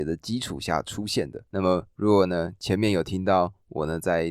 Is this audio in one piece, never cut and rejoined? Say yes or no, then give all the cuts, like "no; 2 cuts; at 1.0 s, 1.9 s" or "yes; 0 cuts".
no; 1 cut; at 1.5 s